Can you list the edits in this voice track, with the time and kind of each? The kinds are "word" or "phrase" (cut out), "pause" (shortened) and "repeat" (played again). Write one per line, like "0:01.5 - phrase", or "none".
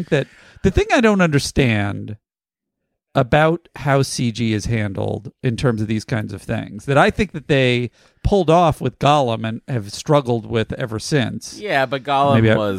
none